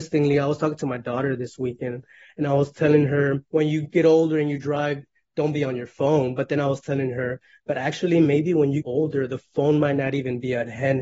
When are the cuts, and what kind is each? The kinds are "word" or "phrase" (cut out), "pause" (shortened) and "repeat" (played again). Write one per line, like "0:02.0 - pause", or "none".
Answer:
0:03.5 - pause
0:08.8 - word